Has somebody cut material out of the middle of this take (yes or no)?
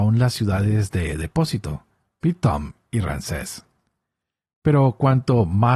no